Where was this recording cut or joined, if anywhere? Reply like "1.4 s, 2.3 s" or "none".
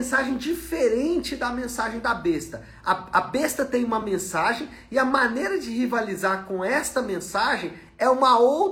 none